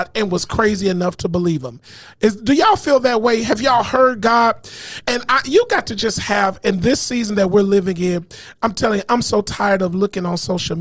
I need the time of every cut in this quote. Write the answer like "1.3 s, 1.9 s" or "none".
none